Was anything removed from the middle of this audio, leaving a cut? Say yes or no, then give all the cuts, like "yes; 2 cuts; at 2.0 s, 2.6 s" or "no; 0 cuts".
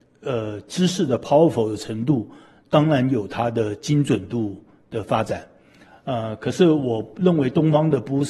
no; 0 cuts